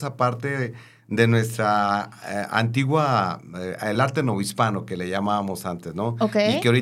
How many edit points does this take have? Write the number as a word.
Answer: zero